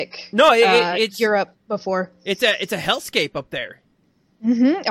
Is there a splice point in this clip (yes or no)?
no